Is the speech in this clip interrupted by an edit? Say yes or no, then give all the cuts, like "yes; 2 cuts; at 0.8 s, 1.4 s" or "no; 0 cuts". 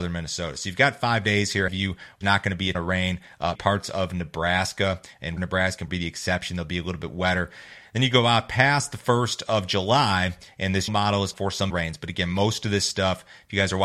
yes; 9 cuts; at 1.7 s, 2.2 s, 2.7 s, 3.5 s, 5.4 s, 5.9 s, 10.9 s, 11.3 s, 11.7 s